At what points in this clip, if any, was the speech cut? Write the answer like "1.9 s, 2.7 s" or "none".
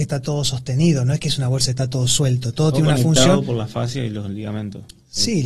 none